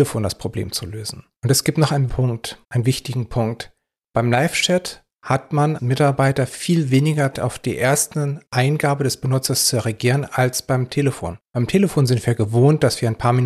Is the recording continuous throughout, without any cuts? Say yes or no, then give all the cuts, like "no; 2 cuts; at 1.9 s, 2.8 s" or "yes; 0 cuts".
no; 8 cuts; at 1.3 s, 2.1 s, 2.6 s, 5.1 s, 5.8 s, 7.3 s, 8.5 s, 11.4 s